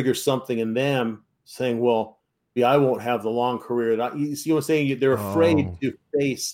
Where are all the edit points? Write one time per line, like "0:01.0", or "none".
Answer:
0:02.6